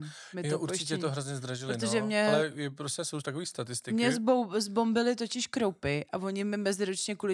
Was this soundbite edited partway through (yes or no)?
no